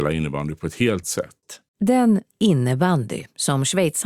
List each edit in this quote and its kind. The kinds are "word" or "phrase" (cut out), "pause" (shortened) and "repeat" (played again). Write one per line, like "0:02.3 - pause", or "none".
0:01.0 - word
0:01.7 - pause